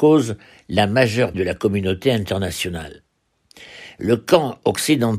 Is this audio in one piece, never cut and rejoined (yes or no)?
no